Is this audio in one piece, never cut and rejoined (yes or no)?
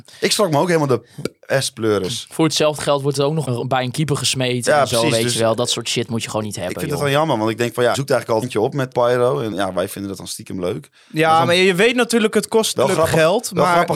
no